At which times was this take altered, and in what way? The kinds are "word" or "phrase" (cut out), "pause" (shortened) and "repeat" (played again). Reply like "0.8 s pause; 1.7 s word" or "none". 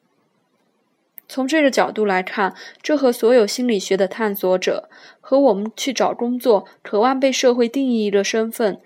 none